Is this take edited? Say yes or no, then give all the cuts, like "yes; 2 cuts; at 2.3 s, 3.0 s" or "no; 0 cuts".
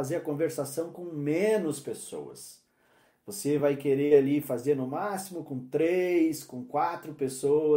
no; 0 cuts